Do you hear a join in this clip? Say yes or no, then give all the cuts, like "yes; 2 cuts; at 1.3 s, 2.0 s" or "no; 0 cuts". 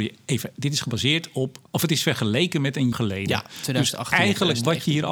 yes; 2 cuts; at 1.7 s, 2.9 s